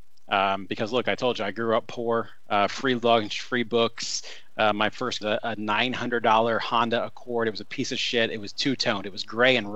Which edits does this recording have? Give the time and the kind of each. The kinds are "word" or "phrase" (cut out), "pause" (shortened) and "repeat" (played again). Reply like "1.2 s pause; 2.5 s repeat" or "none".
5.2 s phrase